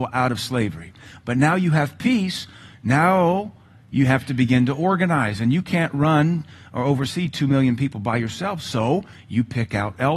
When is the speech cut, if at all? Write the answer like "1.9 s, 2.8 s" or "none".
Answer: none